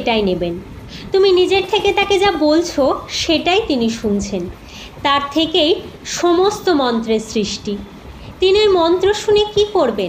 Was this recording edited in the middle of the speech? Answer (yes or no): no